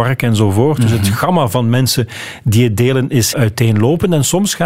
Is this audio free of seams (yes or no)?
no